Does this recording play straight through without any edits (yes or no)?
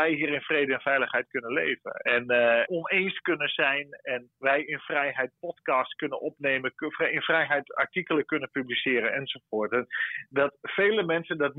no